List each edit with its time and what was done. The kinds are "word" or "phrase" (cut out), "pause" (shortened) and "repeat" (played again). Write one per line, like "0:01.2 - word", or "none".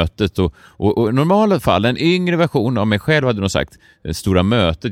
none

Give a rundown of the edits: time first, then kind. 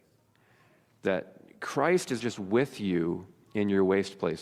0:02.2 - word

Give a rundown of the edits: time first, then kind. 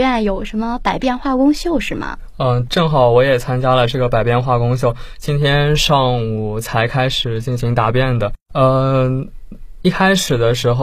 0:02.7 - word
0:08.4 - pause
0:09.5 - repeat

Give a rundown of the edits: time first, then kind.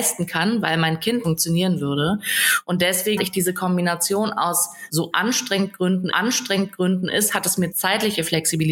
0:01.2 - phrase
0:03.2 - word
0:04.9 - phrase
0:06.1 - repeat
0:07.7 - phrase

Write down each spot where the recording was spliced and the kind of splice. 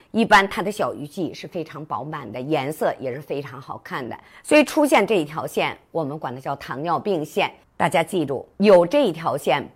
0:04.3 - pause
0:07.6 - pause
0:08.5 - pause

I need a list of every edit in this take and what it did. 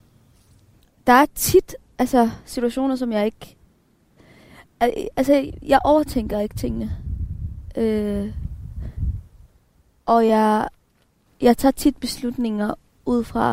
none

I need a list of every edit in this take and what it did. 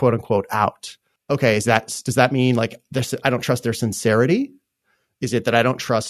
0:01.2 - pause

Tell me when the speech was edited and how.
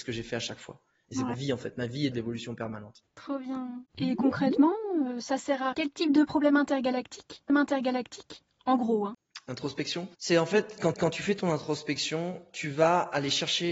0:01.3 - phrase
0:02.1 - phrase
0:03.1 - pause
0:05.7 - word
0:07.5 - repeat
0:10.1 - pause
0:10.9 - repeat

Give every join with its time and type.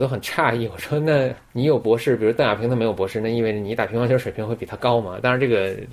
0:01.5 - pause

